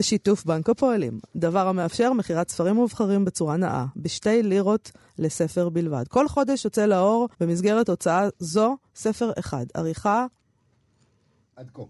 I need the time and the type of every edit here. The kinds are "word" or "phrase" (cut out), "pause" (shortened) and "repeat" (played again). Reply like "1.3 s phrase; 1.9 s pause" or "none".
7.3 s pause